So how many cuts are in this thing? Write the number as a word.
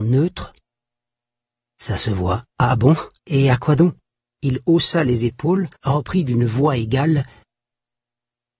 four